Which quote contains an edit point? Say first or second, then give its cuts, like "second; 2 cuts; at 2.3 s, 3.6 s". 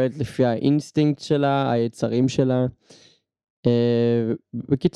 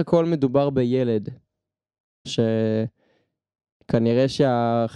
second; 1 cut; at 2.2 s